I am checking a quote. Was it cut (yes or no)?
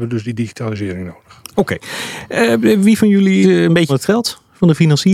yes